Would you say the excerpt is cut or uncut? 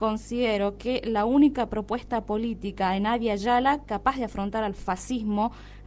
uncut